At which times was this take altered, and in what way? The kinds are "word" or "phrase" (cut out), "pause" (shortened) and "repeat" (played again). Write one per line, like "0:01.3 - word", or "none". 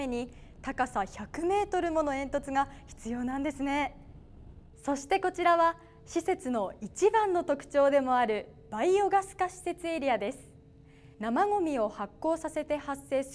0:04.7 - pause
0:11.1 - pause